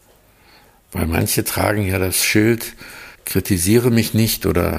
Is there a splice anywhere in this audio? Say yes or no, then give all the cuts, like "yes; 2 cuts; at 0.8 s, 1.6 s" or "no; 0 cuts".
yes; 1 cut; at 3.1 s